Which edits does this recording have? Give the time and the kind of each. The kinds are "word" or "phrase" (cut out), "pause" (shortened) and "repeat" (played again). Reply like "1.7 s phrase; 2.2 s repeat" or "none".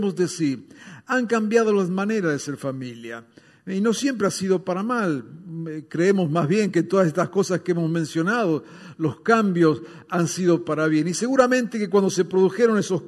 none